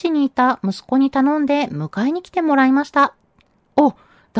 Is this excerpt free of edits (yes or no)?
yes